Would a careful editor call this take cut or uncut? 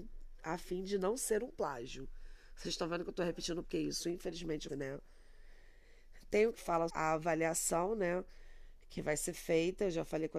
cut